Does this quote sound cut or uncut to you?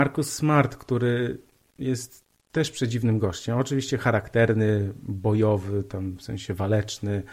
uncut